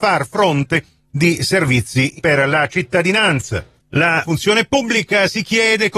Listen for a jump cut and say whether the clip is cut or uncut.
cut